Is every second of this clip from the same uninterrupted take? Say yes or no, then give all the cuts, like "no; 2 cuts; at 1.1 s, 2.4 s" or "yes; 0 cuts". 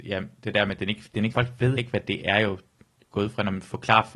no; 2 cuts; at 1.3 s, 1.8 s